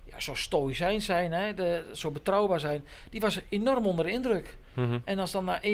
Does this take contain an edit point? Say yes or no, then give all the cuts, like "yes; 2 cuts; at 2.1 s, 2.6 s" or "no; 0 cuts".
no; 0 cuts